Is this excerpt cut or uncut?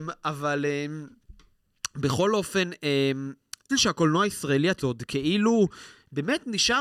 cut